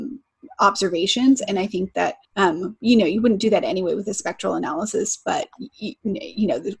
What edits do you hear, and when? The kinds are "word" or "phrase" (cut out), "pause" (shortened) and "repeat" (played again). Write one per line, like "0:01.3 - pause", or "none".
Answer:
0:02.2 - pause

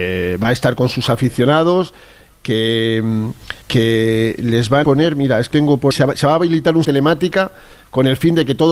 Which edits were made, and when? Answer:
0:03.6 - pause
0:04.8 - word
0:05.5 - word
0:05.9 - word
0:06.8 - phrase

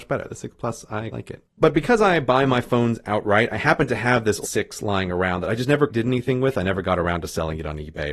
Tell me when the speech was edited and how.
0:01.1 - word
0:04.4 - word
0:05.9 - word

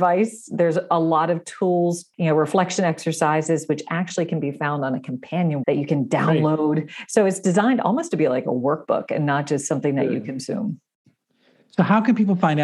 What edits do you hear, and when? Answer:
0:02.1 - word
0:05.6 - word

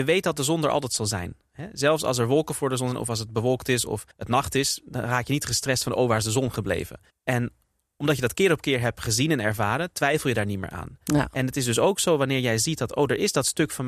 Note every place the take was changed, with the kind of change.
0:04.1 - pause
0:07.1 - pause

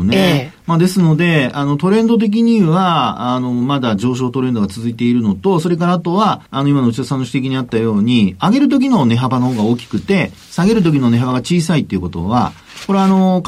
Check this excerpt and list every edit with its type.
0:06.5 - pause

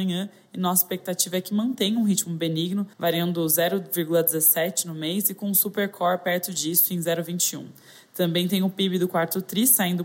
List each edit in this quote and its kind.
0:02.9 - pause

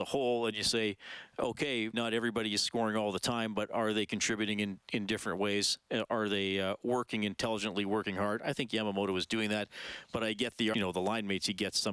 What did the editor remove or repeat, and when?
0:01.9 - word
0:10.7 - phrase

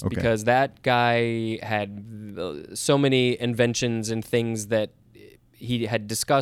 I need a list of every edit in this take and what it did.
none

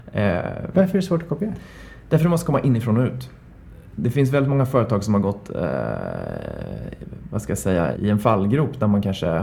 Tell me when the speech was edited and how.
0:08.0 - word

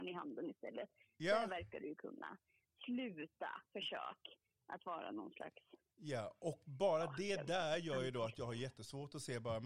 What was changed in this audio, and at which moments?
0:03.7 - pause

